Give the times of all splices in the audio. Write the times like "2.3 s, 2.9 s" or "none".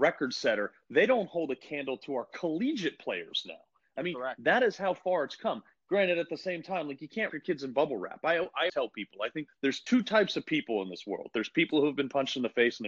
7.3 s, 8.7 s, 9.5 s